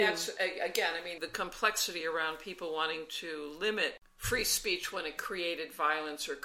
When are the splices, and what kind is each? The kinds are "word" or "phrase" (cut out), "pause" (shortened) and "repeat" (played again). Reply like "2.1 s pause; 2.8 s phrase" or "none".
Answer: none